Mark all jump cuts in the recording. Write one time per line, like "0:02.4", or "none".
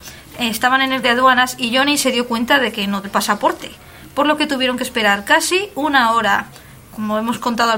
0:01.0
0:03.0